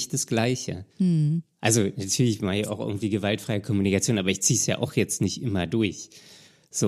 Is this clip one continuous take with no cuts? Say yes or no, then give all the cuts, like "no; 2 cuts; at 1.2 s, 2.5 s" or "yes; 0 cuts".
no; 1 cut; at 0.9 s